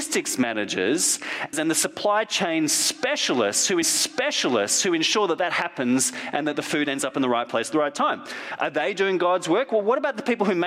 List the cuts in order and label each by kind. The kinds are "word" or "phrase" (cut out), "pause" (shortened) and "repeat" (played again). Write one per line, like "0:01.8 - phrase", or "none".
0:01.5 - phrase
0:03.8 - repeat